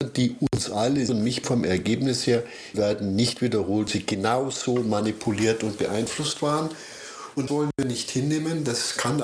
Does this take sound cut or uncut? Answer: cut